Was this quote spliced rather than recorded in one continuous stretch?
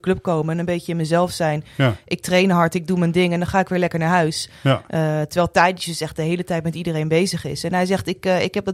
no; 0 cuts

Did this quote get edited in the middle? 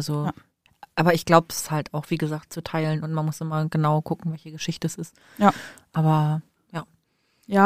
no; 0 cuts

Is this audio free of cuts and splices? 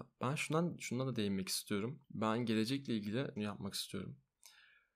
no; 2 cuts; at 2.0 s, 3.4 s

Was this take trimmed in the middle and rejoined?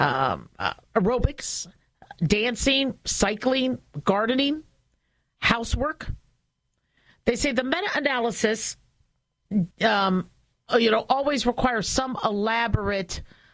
yes; 1 cut; at 9.7 s

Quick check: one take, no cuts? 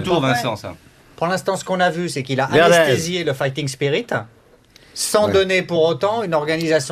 yes; 0 cuts

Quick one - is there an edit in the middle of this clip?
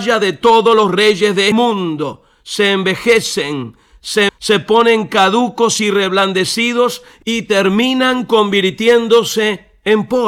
yes; 2 cuts; at 1.5 s, 4.3 s

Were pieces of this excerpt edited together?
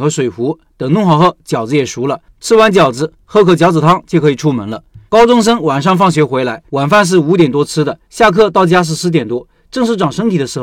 yes; 4 cuts; at 2.3 s, 5.1 s, 6.7 s, 8.0 s

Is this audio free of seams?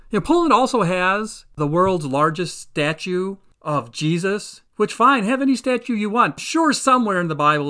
no; 3 cuts; at 1.6 s, 4.7 s, 6.4 s

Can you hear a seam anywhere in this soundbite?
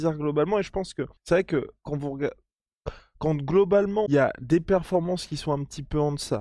yes; 2 cuts; at 1.2 s, 4.1 s

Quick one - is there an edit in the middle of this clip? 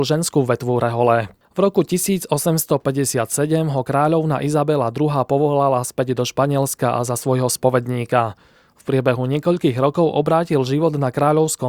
no; 0 cuts

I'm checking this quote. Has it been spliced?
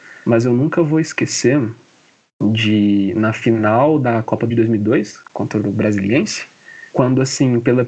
yes; 2 cuts; at 4.5 s, 6.9 s

